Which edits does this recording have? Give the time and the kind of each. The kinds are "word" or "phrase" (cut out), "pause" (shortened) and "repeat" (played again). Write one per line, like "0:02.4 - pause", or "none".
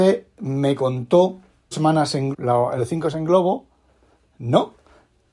0:01.7 - word
0:02.3 - word
0:02.8 - word
0:03.1 - word

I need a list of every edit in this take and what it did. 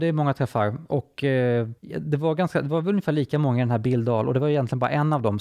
0:01.8 - pause

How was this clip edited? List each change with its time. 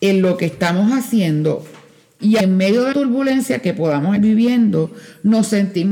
0:02.4 - word
0:02.9 - word
0:04.2 - word

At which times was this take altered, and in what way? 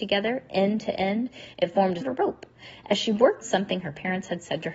0:02.0 - word
0:03.4 - phrase

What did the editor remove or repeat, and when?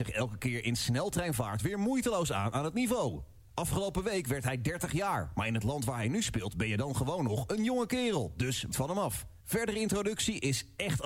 0:08.7 - phrase
0:09.4 - pause

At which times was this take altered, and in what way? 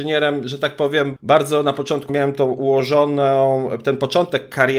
0:01.2 - word
0:02.1 - word

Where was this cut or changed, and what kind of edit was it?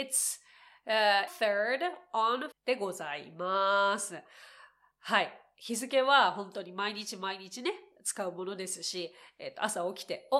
0:01.3 - word
0:02.5 - word

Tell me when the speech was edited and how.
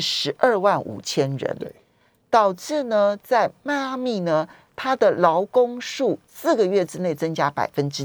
0:06.3 - pause

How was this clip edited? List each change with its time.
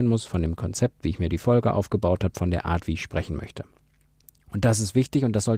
none

